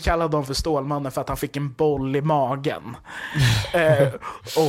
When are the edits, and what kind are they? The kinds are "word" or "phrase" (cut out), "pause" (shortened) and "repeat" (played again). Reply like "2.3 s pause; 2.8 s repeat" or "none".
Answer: none